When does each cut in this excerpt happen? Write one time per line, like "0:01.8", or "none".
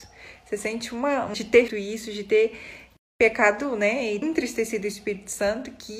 0:01.3
0:01.7
0:04.2